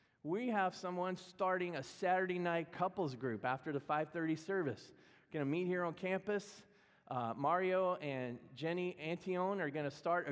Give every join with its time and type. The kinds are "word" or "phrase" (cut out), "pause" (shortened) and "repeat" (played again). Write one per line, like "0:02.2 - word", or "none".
none

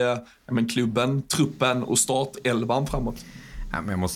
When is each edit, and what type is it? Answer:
none

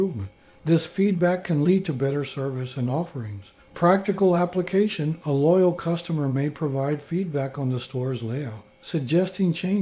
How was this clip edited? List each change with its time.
none

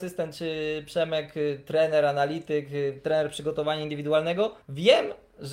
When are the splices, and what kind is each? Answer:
0:04.6 - pause

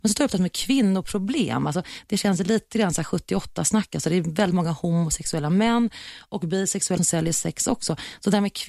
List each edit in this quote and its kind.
0:07.0 - word

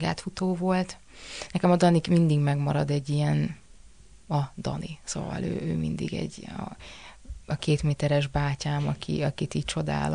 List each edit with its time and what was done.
none

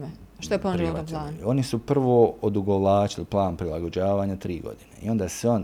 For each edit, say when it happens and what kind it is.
none

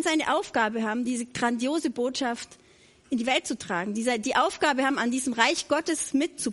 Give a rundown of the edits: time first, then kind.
none

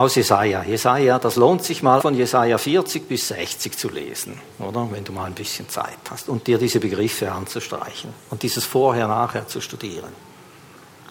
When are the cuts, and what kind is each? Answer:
0:02.0 - word

